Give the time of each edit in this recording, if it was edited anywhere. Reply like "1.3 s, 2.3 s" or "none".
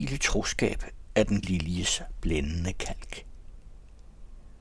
1.4 s

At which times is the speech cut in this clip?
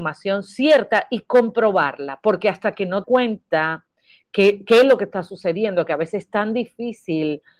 3.0 s

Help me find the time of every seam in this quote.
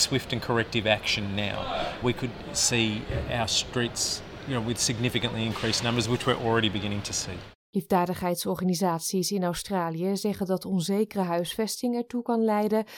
2.0 s

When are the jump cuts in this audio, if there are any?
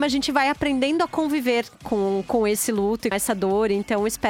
1.7 s, 3.1 s

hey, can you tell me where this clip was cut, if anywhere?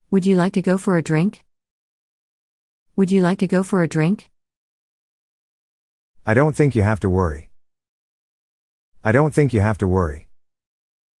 none

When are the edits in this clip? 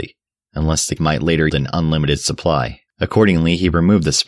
1.0 s, 1.5 s, 2.9 s

